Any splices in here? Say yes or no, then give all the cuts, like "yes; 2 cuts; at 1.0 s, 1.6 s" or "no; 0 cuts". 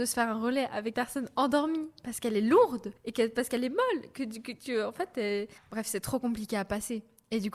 yes; 3 cuts; at 0.9 s, 3.0 s, 5.6 s